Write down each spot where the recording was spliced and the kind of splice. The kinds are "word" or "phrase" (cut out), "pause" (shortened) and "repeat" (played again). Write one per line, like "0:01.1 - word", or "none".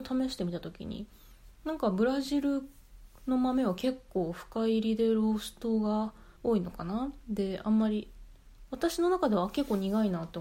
0:06.4 - pause